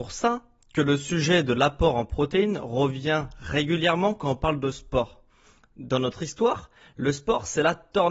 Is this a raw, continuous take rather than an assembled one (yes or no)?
yes